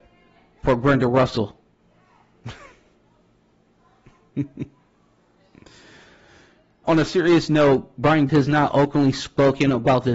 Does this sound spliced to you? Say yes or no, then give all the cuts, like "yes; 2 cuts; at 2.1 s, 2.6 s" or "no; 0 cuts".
yes; 2 cuts; at 6.8 s, 8.3 s